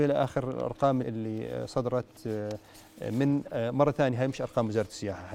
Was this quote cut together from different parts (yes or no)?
yes